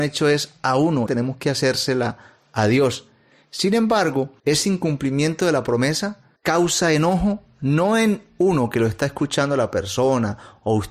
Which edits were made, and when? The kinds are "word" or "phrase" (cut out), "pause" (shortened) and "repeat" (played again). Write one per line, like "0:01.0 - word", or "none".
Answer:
0:01.1 - phrase
0:04.4 - pause
0:06.4 - pause